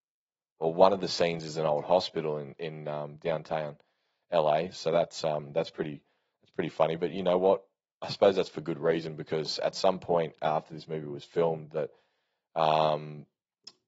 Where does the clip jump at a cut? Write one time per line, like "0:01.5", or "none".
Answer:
none